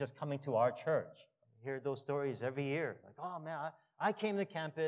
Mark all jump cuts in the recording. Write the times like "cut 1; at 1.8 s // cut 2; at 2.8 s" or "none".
cut 1; at 1.4 s